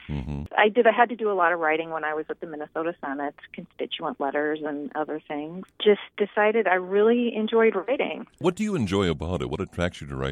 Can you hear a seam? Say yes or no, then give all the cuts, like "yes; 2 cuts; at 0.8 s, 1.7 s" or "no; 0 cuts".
yes; 1 cut; at 5.7 s